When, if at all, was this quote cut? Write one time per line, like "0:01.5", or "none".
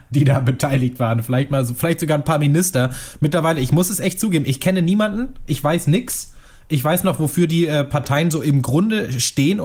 none